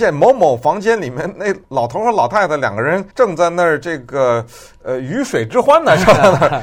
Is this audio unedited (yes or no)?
no